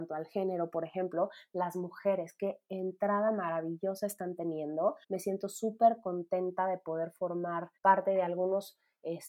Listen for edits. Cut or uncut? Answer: cut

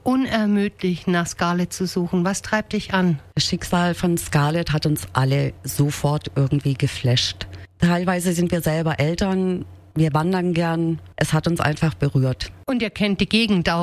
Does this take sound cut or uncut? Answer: cut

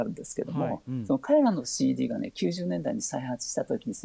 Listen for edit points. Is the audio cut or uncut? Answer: uncut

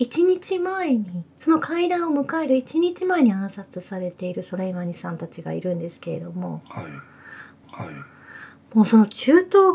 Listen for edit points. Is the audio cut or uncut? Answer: cut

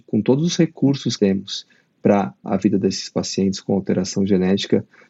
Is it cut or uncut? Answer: cut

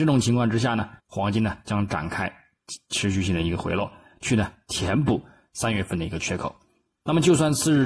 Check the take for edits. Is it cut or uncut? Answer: cut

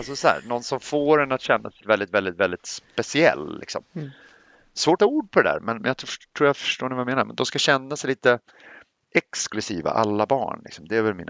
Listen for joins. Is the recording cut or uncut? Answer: cut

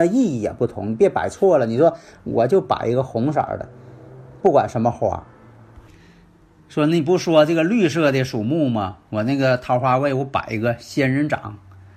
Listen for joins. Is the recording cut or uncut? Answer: uncut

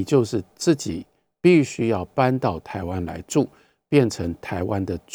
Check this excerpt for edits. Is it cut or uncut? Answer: uncut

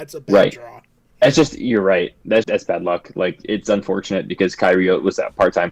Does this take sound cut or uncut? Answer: cut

